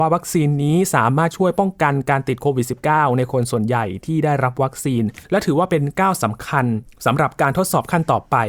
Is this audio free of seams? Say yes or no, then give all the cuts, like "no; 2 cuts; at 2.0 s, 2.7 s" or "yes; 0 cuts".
no; 2 cuts; at 5.2 s, 6.9 s